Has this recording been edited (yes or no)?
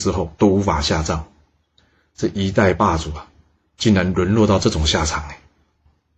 no